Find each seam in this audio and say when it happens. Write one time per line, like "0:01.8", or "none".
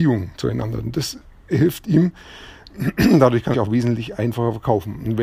0:03.5